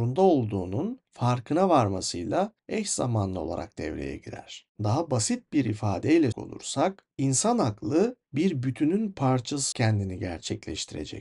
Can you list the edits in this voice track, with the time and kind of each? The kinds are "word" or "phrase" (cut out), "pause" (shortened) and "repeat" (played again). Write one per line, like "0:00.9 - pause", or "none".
0:06.3 - word
0:09.7 - word